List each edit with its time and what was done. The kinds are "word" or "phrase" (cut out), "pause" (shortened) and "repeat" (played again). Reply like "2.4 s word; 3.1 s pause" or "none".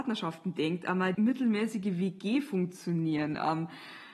1.1 s phrase